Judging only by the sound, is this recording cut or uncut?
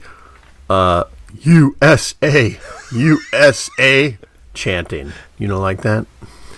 cut